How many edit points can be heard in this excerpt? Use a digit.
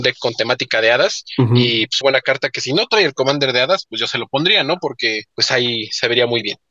2